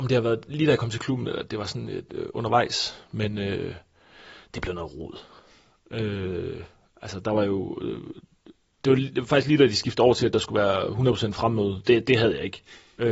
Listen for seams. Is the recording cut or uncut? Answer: uncut